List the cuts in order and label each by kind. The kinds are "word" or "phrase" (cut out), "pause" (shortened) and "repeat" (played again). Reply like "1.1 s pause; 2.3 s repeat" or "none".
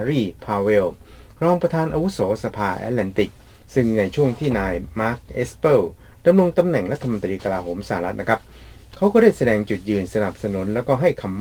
none